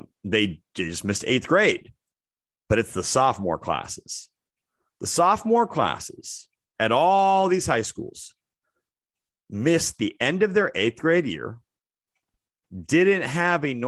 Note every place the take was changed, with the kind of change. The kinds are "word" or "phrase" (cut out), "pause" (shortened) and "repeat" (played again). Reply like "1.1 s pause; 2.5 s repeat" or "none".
none